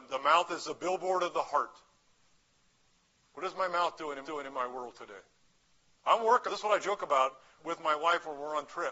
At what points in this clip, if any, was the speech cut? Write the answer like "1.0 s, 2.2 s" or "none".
4.2 s, 6.5 s, 7.6 s